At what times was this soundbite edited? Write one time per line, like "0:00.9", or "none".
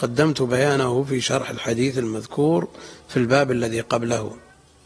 none